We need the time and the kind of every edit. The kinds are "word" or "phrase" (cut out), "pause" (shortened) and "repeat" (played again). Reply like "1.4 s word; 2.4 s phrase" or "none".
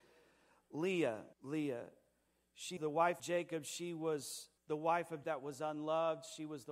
1.3 s pause; 2.8 s word; 3.2 s word; 4.6 s pause; 5.2 s word